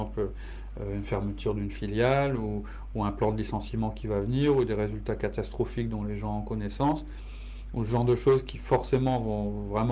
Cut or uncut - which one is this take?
uncut